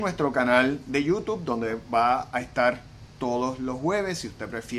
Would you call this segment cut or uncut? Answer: uncut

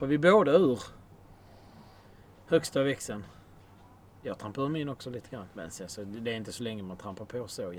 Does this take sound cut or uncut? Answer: cut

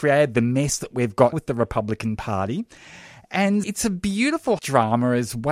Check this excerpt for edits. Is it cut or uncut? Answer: cut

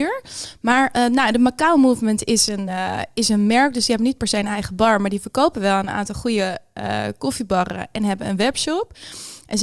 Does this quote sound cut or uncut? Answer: uncut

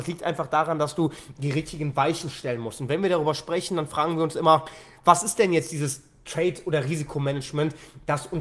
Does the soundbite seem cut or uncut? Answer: uncut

